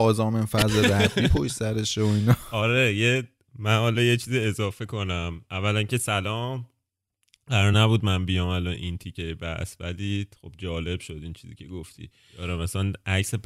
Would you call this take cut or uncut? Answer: uncut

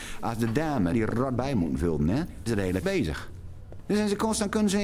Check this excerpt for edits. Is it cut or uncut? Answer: cut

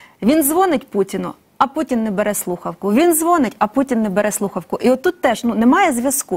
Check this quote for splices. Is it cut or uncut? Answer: uncut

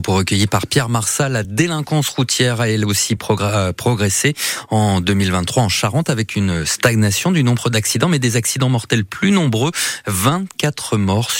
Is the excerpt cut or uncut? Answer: uncut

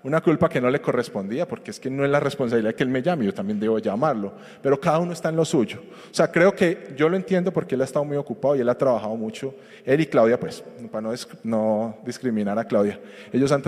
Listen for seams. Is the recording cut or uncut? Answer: uncut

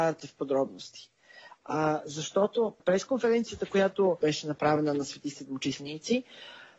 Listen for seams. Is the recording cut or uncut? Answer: cut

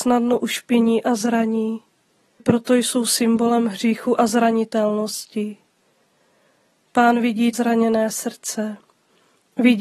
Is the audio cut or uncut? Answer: cut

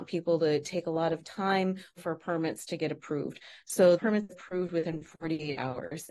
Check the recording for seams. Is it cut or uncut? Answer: cut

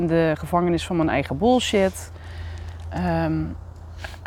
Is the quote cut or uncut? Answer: uncut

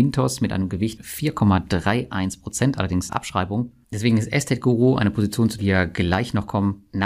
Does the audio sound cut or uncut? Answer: cut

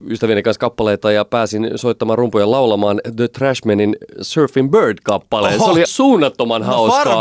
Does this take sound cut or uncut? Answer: cut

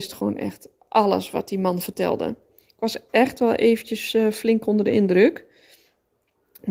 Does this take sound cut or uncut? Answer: uncut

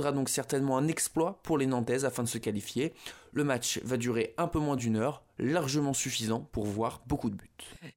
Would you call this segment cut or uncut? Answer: uncut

